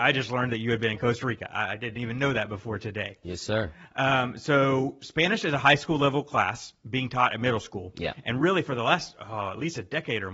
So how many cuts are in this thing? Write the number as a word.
zero